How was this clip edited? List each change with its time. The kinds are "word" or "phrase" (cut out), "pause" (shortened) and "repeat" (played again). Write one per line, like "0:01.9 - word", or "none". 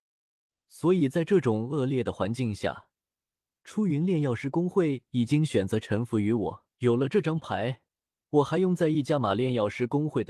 0:06.7 - pause